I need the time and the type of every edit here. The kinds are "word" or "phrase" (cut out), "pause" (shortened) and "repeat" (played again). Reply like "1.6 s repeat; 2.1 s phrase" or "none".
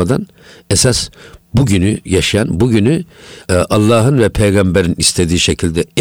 3.4 s pause